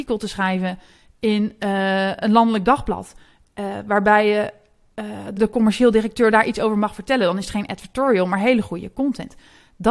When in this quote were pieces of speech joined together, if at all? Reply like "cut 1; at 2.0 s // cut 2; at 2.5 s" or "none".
cut 1; at 5.4 s